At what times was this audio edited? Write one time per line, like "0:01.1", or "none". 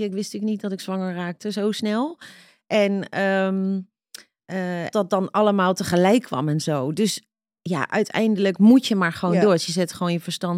0:04.9